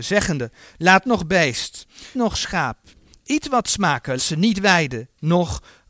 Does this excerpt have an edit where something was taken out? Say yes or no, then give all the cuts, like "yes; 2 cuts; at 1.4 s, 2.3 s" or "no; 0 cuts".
yes; 3 cuts; at 1.0 s, 2.1 s, 4.2 s